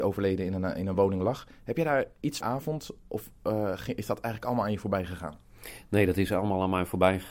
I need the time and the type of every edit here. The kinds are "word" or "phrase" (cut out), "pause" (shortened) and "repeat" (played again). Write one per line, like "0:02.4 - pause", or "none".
0:02.4 - phrase